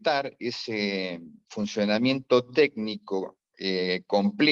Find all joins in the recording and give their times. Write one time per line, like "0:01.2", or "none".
none